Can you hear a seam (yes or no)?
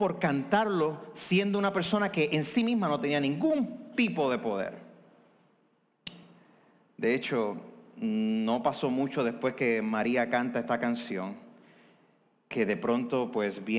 no